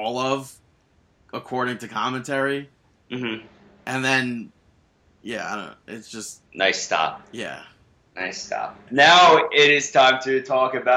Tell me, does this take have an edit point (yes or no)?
yes